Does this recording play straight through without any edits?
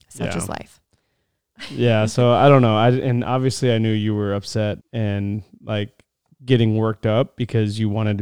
no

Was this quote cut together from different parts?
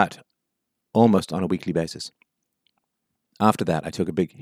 no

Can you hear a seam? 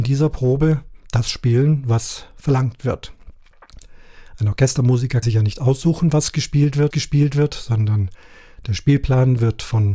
yes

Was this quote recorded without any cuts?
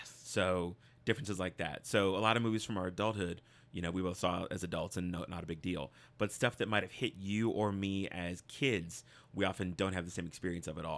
yes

